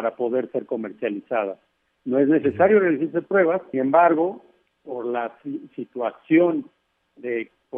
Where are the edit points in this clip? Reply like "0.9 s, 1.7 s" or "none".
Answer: 3.7 s